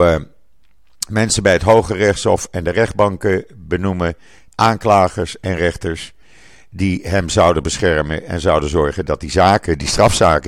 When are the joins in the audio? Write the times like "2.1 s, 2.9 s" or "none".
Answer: none